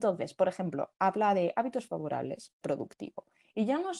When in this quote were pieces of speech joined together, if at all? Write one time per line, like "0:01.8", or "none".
0:02.6